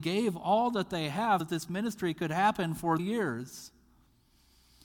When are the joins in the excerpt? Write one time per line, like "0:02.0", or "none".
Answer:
0:01.4
0:03.0